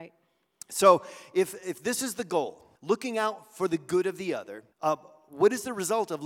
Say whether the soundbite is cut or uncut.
cut